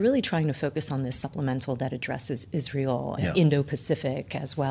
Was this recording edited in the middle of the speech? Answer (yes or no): yes